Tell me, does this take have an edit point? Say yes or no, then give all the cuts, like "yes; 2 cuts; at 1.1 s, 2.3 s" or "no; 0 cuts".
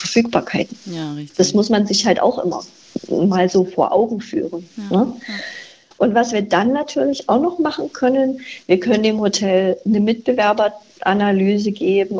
no; 0 cuts